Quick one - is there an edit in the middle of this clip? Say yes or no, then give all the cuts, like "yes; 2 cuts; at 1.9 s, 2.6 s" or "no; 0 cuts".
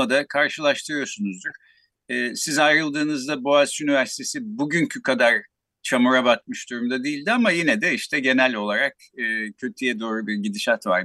no; 0 cuts